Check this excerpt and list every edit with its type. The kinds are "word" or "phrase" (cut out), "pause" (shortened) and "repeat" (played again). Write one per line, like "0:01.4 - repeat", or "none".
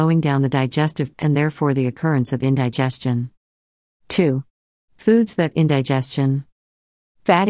0:01.1 - word
0:05.5 - word